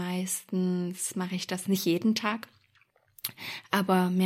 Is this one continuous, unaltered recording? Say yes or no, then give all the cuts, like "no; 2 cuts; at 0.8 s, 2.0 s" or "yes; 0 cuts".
yes; 0 cuts